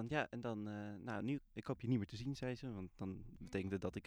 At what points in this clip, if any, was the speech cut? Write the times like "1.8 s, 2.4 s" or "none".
1.6 s